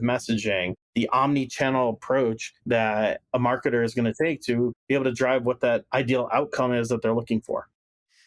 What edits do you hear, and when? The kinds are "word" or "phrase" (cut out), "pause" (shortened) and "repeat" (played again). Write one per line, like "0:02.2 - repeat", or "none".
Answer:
none

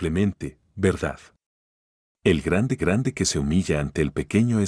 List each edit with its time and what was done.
0:02.8 - repeat

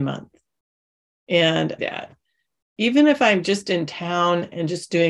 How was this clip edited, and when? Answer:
0:01.8 - phrase

